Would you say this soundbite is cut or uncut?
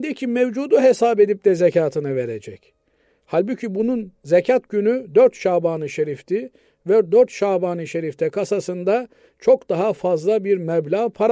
uncut